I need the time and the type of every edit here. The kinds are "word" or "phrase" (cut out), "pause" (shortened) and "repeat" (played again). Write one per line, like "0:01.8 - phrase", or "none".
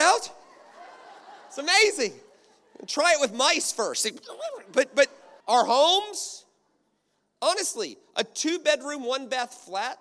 0:05.4 - pause